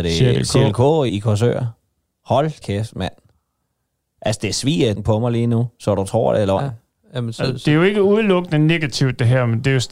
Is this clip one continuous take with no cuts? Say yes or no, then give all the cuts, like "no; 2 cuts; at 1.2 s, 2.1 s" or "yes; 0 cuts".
no; 3 cuts; at 1.1 s, 2.6 s, 5.0 s